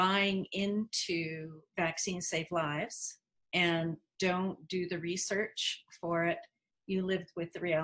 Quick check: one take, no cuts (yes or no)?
yes